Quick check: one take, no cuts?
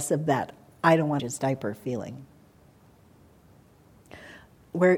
no; 1 cut; at 1.2 s

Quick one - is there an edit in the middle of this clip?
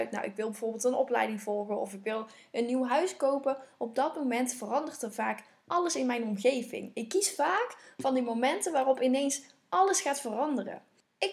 no; 0 cuts

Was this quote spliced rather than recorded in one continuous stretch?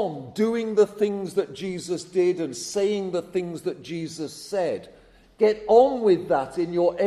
no; 0 cuts

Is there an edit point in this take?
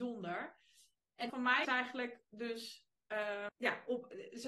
yes; 3 cuts; at 1.3 s, 1.6 s, 3.5 s

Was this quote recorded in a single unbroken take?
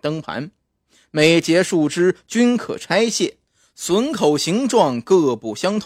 yes; 0 cuts

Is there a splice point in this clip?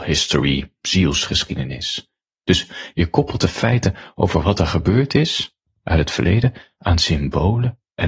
no; 0 cuts

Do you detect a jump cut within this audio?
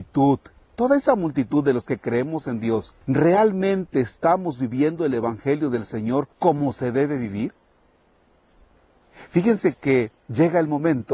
yes; 3 cuts; at 3.0 s, 6.3 s, 10.2 s

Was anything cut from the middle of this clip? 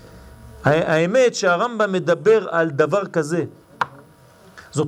no; 0 cuts

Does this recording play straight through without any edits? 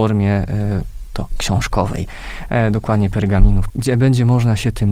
no; 2 cuts; at 1.1 s, 3.7 s

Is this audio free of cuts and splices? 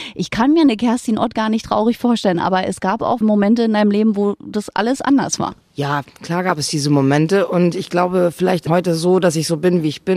no; 2 cuts; at 3.2 s, 8.7 s

